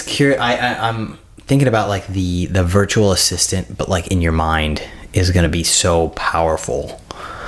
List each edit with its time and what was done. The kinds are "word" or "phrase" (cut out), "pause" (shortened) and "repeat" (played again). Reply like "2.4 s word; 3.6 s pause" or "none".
none